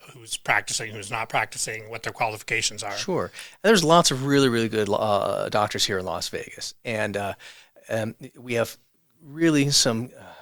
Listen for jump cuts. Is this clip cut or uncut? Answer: uncut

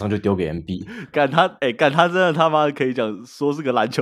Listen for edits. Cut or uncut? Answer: cut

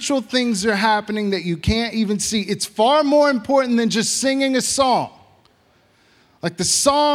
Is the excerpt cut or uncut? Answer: uncut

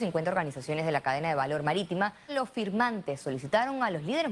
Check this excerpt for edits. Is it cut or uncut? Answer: cut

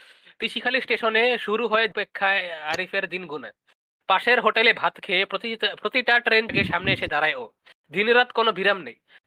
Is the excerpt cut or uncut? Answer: cut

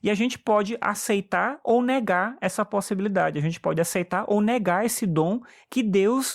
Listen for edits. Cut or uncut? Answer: uncut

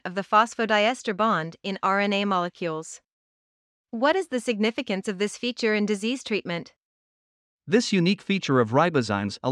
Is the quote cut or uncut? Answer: uncut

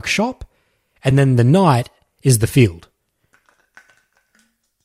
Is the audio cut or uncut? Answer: uncut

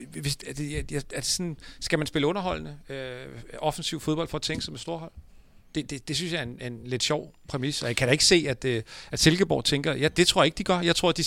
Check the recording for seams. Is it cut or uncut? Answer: uncut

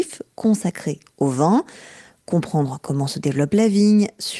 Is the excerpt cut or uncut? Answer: uncut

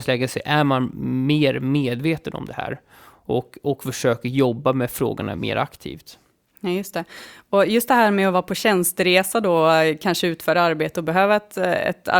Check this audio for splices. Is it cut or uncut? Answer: uncut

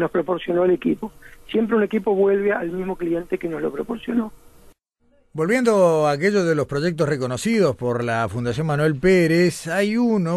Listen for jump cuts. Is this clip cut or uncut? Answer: uncut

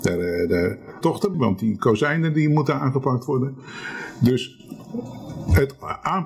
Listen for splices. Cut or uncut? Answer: cut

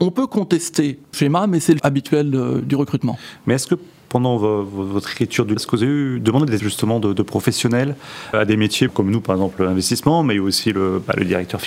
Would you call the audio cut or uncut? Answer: cut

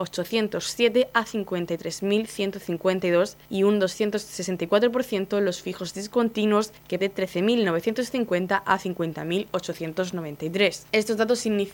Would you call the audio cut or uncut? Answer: cut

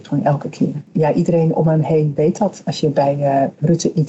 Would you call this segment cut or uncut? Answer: uncut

